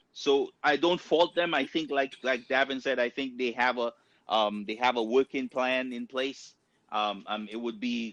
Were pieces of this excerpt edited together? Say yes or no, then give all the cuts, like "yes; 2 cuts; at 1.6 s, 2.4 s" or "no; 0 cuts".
no; 0 cuts